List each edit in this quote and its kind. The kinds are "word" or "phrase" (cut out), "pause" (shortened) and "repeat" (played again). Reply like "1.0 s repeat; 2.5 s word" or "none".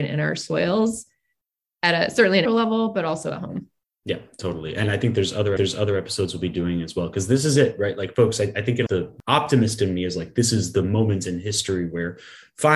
2.5 s word; 5.6 s repeat; 8.9 s phrase